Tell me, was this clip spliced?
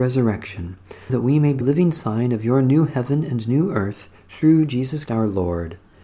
yes; 4 cuts; at 1.1 s, 1.6 s, 4.2 s, 5.1 s

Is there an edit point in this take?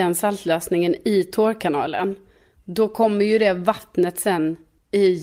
no; 0 cuts

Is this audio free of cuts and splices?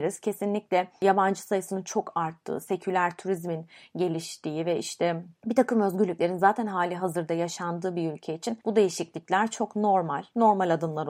yes; 0 cuts

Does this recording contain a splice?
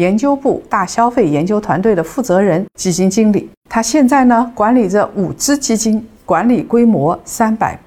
yes; 1 cut; at 3.6 s

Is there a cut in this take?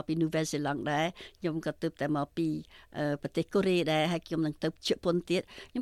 yes; 1 cut; at 4.8 s

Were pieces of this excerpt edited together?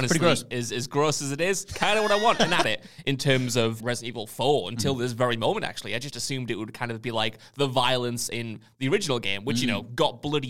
yes; 2 cuts; at 2.6 s, 3.8 s

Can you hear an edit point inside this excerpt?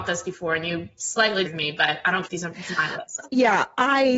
yes; 3 cuts; at 1.4 s, 2.3 s, 3.3 s

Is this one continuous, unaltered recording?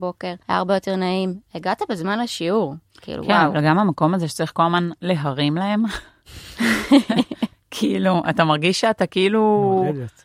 no; 1 cut; at 2.9 s

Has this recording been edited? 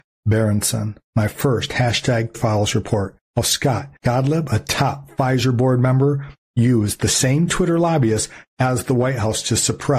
yes; 4 cuts; at 1.0 s, 2.3 s, 3.2 s, 4.0 s

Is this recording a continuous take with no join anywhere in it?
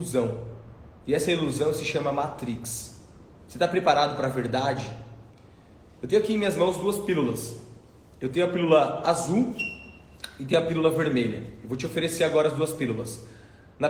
yes; 0 cuts

